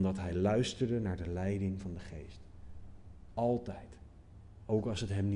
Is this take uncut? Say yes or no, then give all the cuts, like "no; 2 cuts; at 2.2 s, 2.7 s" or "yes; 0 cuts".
yes; 0 cuts